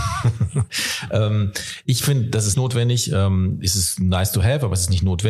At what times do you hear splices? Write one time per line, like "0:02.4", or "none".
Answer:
0:02.5